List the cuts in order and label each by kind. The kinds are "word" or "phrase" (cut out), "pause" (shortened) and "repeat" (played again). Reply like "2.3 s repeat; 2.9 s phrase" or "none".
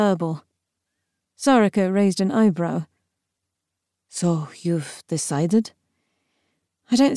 none